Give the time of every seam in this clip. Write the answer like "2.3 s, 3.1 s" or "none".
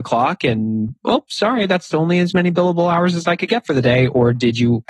none

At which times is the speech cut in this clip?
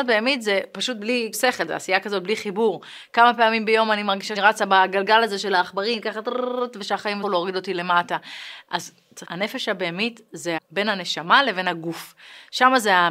1.3 s, 4.4 s, 7.2 s, 9.2 s, 10.6 s

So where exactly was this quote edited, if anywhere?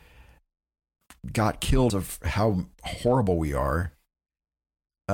1.9 s

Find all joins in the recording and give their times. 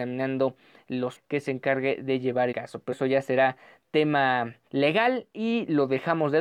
1.2 s, 2.5 s, 2.9 s, 4.7 s

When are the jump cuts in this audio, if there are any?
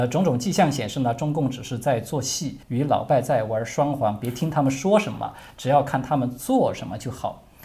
2.6 s

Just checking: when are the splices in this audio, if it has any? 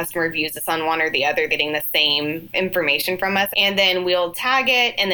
1.5 s, 3.5 s

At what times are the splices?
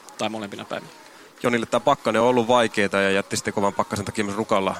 none

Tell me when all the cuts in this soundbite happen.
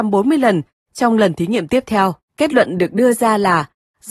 2.2 s

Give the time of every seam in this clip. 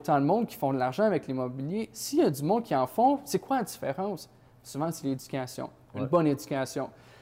none

